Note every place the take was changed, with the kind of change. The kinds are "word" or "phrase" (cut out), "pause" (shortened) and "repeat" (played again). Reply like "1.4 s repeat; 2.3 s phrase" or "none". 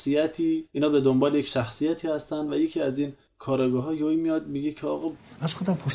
none